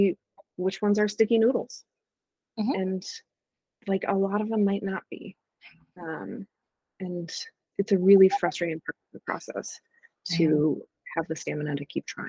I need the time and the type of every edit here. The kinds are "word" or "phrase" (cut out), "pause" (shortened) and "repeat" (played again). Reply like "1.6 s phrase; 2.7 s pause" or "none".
7.7 s word